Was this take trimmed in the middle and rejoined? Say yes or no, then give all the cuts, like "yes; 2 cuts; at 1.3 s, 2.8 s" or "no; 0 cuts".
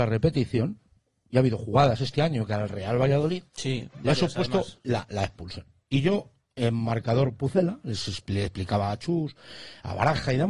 yes; 2 cuts; at 3.5 s, 4.8 s